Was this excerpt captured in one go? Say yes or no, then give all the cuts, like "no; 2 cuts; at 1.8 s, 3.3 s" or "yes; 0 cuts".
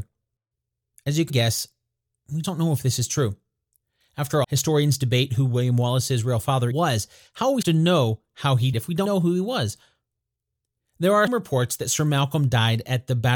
no; 8 cuts; at 1.3 s, 2.4 s, 4.4 s, 6.7 s, 7.6 s, 8.7 s, 9.0 s, 11.3 s